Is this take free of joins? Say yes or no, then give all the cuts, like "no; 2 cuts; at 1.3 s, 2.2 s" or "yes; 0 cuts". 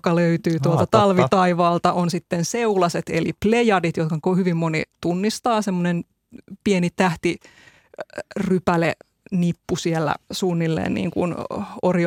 no; 2 cuts; at 9.0 s, 10.2 s